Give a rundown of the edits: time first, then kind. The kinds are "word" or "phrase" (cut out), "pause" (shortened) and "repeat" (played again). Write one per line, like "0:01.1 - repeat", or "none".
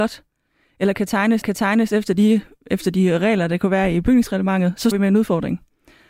0:01.4 - repeat
0:04.9 - word

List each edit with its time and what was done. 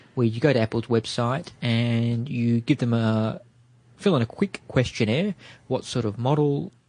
none

